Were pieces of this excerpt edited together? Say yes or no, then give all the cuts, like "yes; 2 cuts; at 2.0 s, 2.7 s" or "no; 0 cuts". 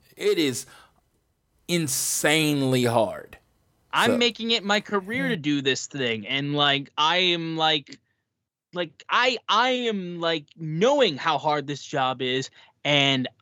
no; 0 cuts